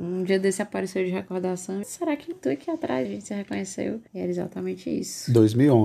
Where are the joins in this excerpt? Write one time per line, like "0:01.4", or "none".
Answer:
0:01.8
0:02.3
0:03.1
0:04.1